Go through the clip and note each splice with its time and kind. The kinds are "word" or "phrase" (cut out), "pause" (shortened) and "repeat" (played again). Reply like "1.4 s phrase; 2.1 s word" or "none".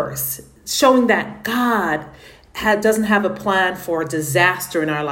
none

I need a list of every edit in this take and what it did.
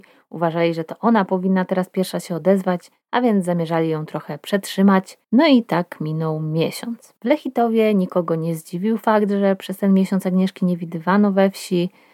3.0 s pause; 5.2 s pause; 7.2 s pause

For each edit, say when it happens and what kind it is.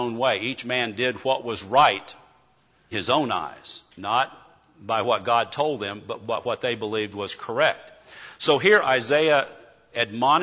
2.9 s word; 3.9 s pause

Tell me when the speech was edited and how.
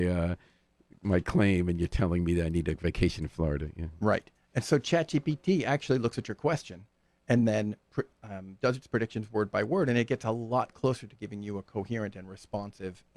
none

